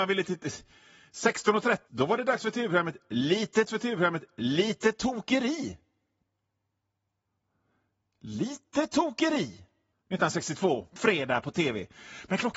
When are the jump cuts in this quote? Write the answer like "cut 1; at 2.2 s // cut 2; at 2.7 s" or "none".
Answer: cut 1; at 1.9 s // cut 2; at 3.7 s // cut 3; at 9.9 s // cut 4; at 11.0 s